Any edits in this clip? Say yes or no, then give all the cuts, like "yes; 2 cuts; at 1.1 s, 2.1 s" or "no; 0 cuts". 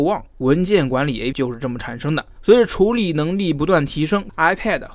yes; 1 cut; at 1.3 s